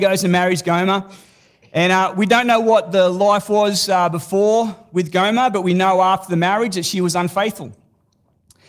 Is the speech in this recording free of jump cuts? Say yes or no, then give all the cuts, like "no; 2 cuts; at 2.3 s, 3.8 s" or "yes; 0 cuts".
yes; 0 cuts